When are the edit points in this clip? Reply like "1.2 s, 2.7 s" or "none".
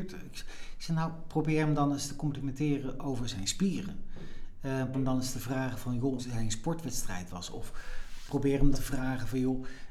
4.9 s, 6.2 s, 8.7 s